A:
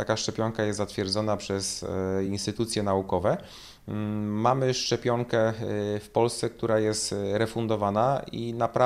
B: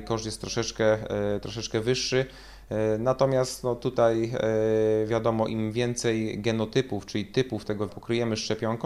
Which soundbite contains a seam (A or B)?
B